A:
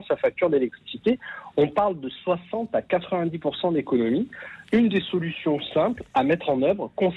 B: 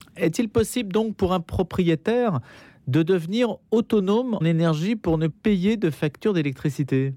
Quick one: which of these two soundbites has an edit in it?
B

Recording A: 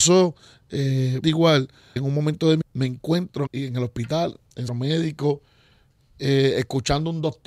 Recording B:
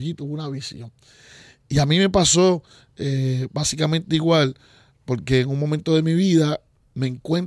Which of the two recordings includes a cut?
A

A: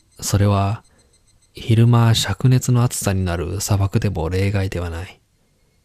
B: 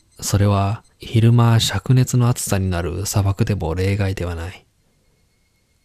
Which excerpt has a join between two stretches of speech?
B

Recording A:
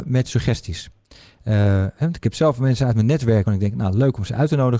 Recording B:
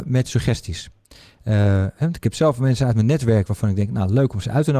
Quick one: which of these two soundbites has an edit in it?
A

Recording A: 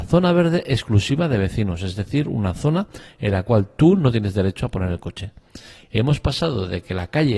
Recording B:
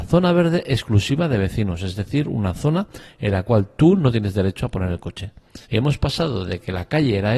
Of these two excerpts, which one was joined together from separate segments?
B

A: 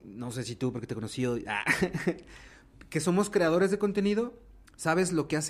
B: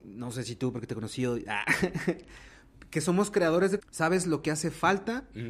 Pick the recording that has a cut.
B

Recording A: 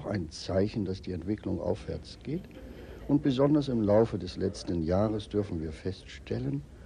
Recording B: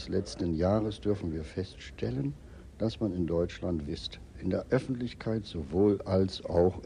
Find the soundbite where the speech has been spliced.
B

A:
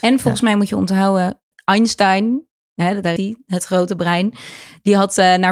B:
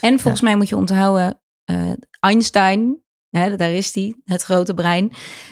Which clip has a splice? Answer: A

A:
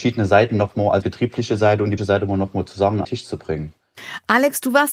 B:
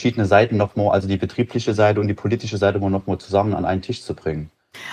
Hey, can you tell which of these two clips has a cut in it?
A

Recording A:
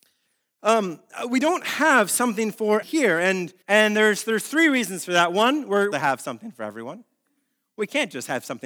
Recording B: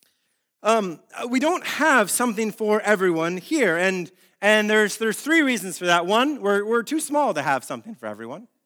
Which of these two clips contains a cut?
A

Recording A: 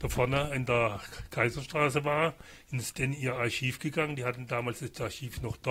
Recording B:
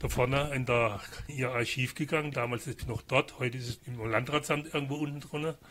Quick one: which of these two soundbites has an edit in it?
B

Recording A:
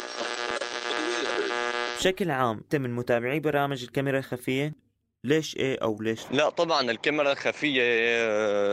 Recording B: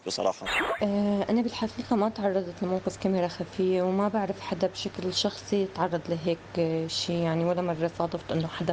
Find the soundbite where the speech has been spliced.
A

